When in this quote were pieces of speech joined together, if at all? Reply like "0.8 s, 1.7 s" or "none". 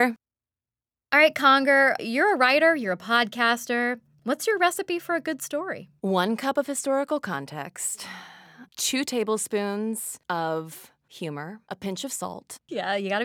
4.1 s, 6.0 s, 11.6 s